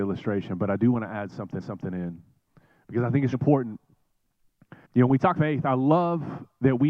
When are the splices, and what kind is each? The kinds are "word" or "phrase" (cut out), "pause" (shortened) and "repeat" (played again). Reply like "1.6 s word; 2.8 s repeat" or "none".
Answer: 1.6 s repeat; 3.3 s word; 4.8 s pause; 5.4 s word